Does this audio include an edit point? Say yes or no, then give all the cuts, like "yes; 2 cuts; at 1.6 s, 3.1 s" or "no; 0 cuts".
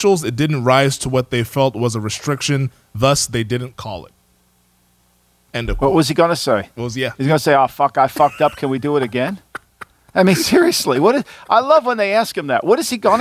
no; 0 cuts